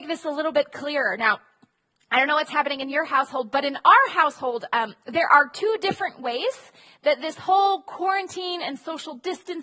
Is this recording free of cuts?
yes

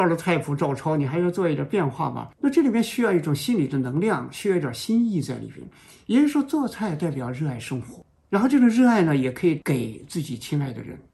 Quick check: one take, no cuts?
yes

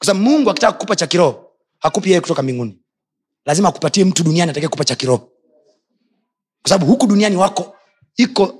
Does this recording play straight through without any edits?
yes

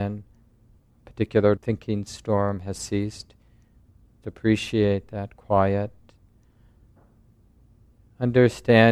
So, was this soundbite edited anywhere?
yes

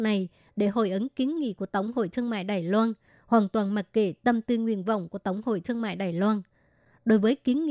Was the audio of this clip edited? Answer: no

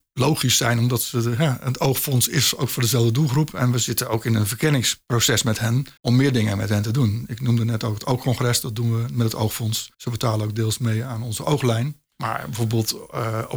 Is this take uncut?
no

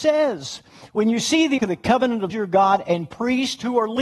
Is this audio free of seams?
no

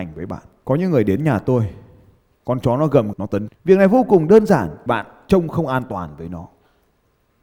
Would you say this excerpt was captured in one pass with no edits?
no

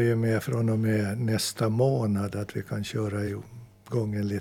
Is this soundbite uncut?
yes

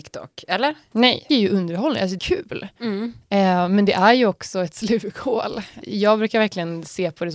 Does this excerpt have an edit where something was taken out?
yes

